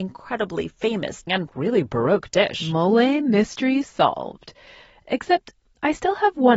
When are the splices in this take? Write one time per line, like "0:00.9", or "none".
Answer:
0:01.3